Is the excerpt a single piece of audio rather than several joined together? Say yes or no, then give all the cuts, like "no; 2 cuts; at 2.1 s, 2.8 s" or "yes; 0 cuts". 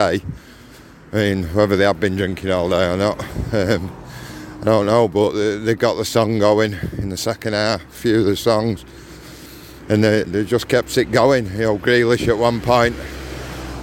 yes; 0 cuts